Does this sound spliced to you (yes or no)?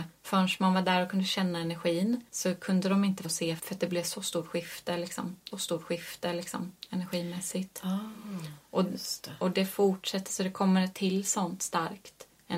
yes